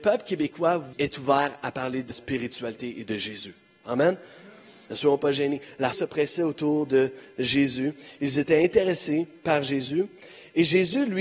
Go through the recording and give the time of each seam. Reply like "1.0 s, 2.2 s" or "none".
0.9 s, 2.1 s, 5.9 s